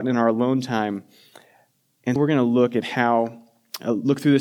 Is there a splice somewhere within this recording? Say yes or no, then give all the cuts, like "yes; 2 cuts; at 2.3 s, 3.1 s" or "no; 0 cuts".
yes; 1 cut; at 2.2 s